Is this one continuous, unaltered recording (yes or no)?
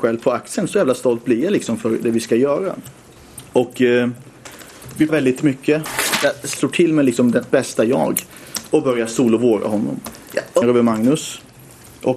no